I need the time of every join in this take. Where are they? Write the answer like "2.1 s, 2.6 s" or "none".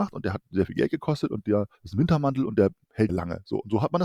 1.7 s, 3.1 s